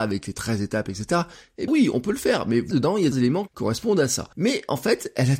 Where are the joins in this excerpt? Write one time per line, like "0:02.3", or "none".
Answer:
0:01.7
0:02.7
0:03.1
0:03.5
0:04.3